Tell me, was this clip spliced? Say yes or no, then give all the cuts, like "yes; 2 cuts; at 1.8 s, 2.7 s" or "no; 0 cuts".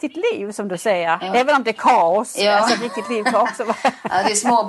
no; 0 cuts